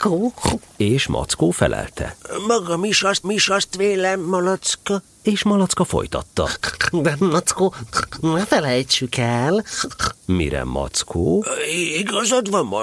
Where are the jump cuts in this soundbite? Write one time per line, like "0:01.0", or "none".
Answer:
0:03.2
0:07.2
0:10.2

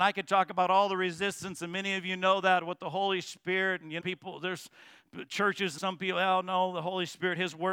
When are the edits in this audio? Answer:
0:04.0
0:05.8

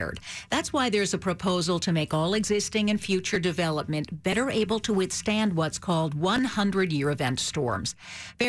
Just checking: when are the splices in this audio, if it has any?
none

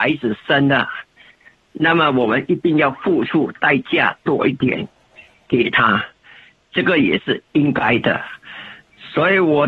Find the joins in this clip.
0:07.5

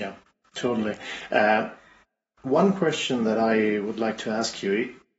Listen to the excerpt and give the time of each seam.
none

